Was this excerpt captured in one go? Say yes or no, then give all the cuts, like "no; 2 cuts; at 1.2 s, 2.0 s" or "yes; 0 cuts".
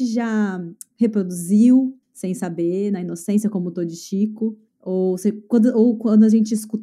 no; 2 cuts; at 2.0 s, 4.7 s